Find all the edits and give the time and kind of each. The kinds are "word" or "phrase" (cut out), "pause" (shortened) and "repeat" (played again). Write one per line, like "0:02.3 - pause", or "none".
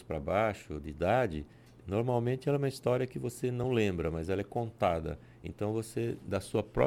none